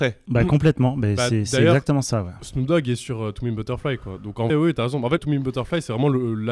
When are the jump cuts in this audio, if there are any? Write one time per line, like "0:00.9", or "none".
0:04.5
0:05.2